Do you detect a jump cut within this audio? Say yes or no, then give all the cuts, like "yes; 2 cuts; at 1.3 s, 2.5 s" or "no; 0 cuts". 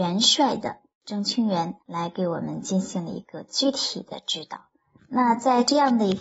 yes; 2 cuts; at 1.8 s, 5.0 s